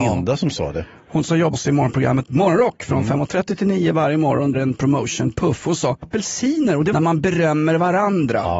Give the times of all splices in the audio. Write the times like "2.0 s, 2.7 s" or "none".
1.5 s, 4.5 s, 6.0 s, 6.9 s